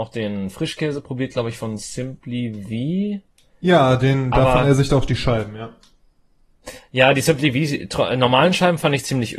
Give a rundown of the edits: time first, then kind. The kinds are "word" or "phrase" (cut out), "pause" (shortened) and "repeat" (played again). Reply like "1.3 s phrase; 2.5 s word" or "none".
none